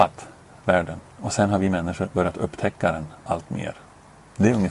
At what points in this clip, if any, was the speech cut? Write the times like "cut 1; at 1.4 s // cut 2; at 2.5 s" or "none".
cut 1; at 1.1 s